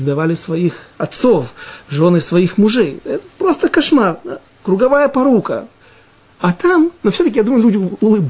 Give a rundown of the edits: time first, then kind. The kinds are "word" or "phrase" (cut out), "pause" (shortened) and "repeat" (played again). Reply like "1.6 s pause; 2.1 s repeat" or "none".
none